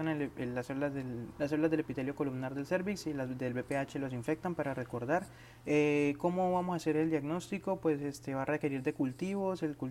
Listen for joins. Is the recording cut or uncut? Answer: cut